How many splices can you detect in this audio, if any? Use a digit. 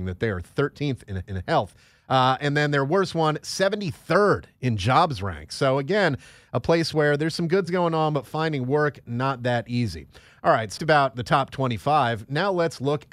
3